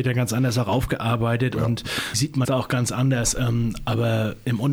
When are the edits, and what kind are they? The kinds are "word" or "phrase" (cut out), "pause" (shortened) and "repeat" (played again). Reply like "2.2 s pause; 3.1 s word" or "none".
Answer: 2.1 s word; 2.4 s word